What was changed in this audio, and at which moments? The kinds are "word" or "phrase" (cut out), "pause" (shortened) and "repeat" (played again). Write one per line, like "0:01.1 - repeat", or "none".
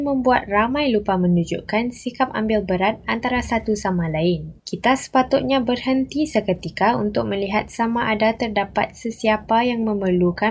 0:04.6 - pause